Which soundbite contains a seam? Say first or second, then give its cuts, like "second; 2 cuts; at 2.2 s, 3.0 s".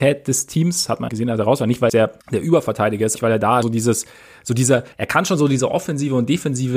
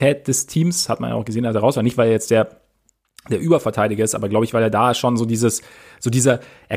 first; 6 cuts; at 1.1 s, 1.9 s, 2.2 s, 3.2 s, 3.6 s, 4.9 s